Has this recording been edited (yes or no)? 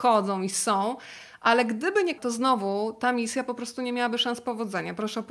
yes